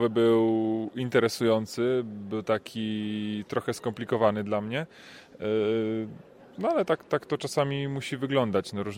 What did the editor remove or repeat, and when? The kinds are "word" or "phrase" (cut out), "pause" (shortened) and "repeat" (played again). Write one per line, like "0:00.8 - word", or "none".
none